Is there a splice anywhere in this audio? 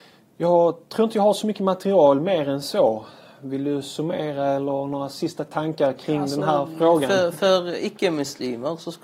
no; 0 cuts

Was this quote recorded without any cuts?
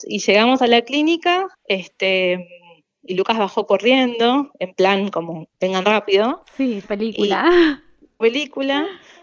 no; 4 cuts; at 1.5 s, 5.5 s, 6.8 s, 8.2 s

